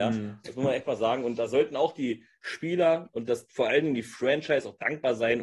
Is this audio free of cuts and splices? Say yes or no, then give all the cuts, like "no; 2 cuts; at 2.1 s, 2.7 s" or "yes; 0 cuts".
yes; 0 cuts